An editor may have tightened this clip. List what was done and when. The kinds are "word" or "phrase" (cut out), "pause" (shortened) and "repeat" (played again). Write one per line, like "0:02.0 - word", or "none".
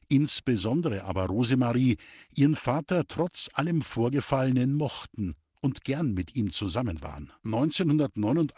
0:07.4 - pause